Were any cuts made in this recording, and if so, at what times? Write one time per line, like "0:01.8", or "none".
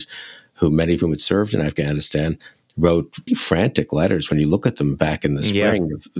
0:03.3

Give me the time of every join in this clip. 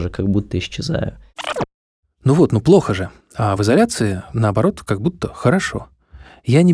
none

